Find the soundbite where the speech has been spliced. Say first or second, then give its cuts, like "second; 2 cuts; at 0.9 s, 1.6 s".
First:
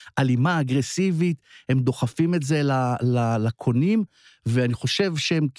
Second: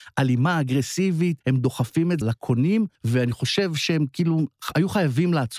second; 3 cuts; at 1.4 s, 2.2 s, 3.0 s